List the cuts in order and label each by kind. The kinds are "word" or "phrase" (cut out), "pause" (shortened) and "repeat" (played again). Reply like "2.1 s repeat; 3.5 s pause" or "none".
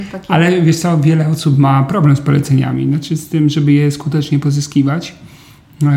none